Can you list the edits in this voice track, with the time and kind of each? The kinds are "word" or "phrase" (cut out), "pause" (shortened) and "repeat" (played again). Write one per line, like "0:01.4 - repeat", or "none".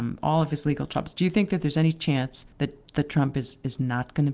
0:02.5 - pause